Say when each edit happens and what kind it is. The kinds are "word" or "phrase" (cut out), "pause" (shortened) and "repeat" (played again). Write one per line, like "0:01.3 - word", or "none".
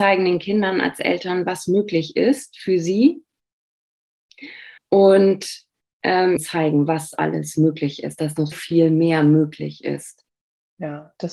0:04.8 - pause
0:06.4 - phrase
0:08.5 - word